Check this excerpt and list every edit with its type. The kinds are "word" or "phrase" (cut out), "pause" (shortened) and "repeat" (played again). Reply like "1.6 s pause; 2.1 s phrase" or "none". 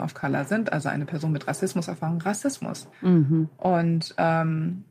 2.9 s pause

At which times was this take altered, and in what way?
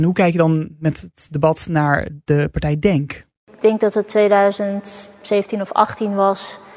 none

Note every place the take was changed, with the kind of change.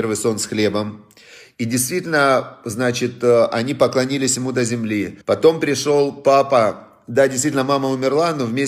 5.2 s pause

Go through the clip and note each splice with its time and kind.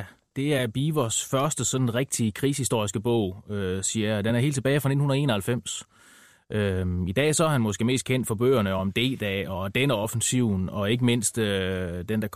none

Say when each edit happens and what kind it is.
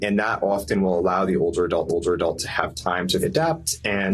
1.9 s repeat; 3.2 s word

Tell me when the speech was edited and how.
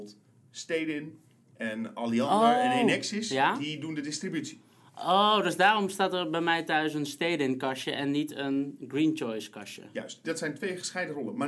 none

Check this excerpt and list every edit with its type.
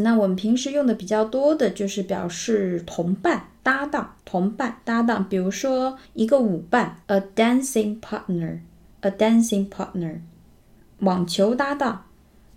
3.6 s pause; 4.2 s pause; 6.0 s pause; 7.0 s pause

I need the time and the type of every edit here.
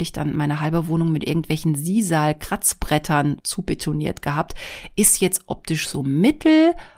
none

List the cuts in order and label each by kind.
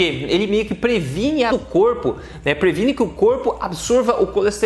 1.5 s word

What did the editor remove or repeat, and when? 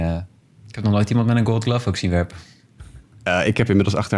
none

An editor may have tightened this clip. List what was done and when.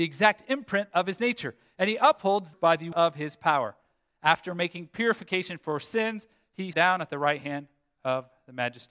2.5 s word; 2.9 s word; 6.7 s word

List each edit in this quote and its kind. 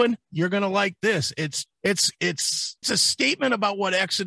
1.7 s phrase; 2.8 s word

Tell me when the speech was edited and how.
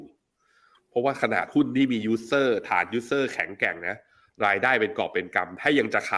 none

